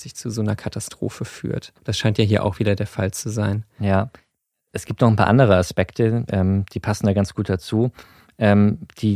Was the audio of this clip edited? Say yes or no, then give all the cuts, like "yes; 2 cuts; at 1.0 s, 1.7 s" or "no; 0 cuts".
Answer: yes; 1 cut; at 1.8 s